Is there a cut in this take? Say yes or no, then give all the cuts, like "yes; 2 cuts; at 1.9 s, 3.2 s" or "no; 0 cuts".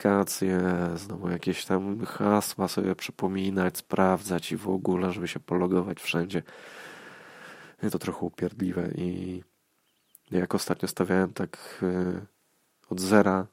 yes; 1 cut; at 7.9 s